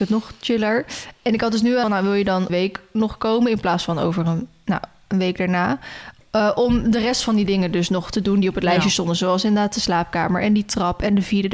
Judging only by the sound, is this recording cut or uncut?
cut